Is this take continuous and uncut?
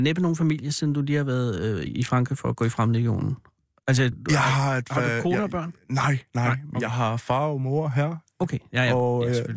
no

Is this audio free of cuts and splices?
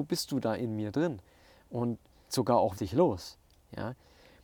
no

